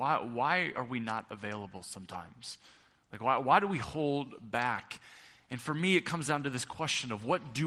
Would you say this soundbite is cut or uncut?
uncut